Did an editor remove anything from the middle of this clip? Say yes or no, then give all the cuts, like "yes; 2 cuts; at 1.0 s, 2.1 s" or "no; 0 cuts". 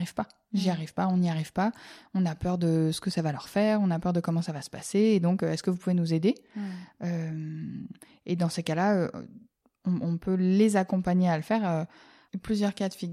no; 0 cuts